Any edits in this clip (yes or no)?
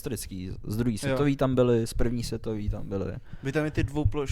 no